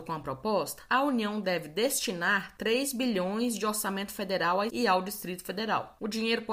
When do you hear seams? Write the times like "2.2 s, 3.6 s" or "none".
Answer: 4.7 s